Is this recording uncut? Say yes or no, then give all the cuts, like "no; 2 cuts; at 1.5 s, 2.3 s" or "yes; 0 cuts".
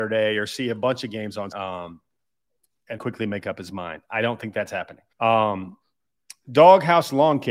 no; 3 cuts; at 1.5 s, 3.0 s, 5.1 s